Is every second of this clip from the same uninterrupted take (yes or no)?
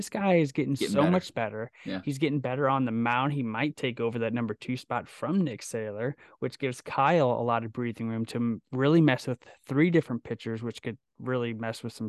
yes